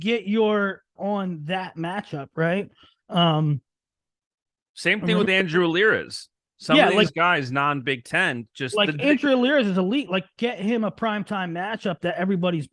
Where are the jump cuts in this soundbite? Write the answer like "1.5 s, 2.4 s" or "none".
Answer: 1.0 s